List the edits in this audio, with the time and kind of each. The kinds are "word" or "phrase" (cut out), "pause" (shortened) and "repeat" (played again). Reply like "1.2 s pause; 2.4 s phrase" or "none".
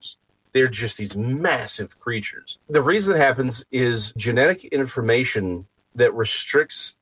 2.6 s pause; 4.2 s word